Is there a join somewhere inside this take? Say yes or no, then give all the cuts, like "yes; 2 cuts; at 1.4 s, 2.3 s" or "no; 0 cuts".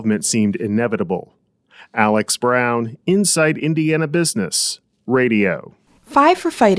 no; 0 cuts